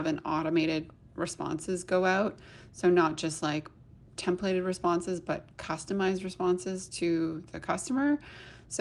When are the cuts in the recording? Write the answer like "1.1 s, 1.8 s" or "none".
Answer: none